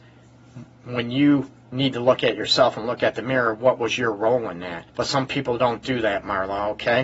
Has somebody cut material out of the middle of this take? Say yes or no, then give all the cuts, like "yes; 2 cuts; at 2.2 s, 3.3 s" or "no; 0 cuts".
yes; 1 cut; at 4.9 s